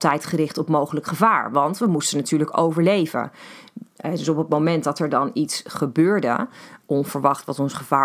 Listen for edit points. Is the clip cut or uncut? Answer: uncut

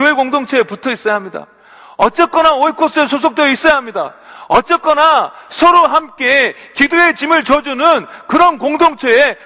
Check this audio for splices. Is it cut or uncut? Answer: uncut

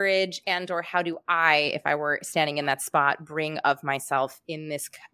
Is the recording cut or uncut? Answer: uncut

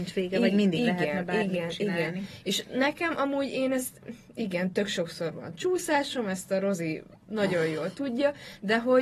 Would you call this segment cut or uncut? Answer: uncut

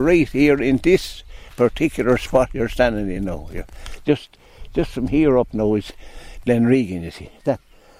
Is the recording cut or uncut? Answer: uncut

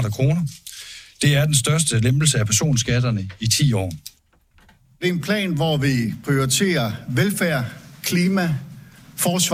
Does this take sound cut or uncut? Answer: uncut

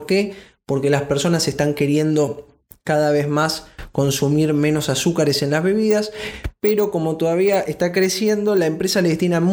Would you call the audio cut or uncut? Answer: uncut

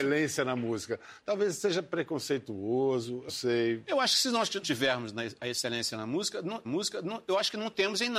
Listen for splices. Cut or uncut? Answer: cut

